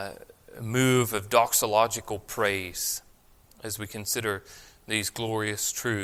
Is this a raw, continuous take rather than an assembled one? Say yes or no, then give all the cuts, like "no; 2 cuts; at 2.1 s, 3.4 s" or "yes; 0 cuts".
yes; 0 cuts